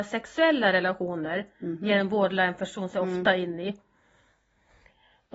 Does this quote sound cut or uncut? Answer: uncut